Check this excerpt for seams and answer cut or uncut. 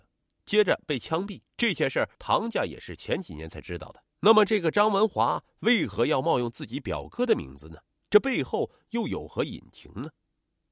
cut